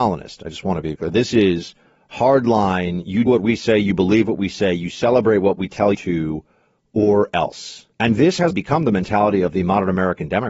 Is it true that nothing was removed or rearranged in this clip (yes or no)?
no